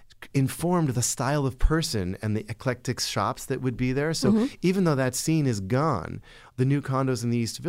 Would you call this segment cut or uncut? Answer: uncut